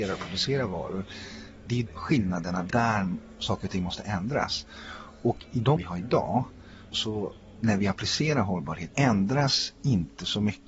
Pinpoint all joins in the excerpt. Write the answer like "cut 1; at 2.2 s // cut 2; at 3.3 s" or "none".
cut 1; at 1.9 s // cut 2; at 2.7 s // cut 3; at 5.8 s // cut 4; at 6.9 s // cut 5; at 8.9 s